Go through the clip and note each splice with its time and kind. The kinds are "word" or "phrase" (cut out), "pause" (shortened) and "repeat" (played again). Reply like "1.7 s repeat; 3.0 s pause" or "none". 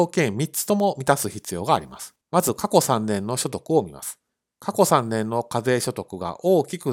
2.2 s pause; 4.3 s pause